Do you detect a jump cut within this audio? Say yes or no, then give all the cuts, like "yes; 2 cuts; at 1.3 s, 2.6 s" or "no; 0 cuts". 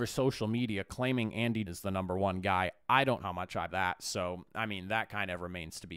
yes; 3 cuts; at 1.7 s, 3.2 s, 3.7 s